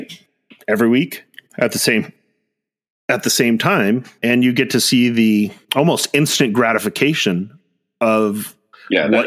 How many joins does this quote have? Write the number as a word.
zero